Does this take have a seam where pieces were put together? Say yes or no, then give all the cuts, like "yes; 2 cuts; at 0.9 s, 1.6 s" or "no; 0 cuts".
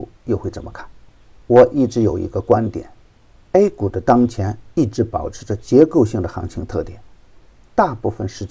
no; 0 cuts